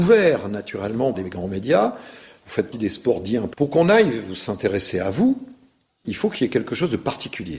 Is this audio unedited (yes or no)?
no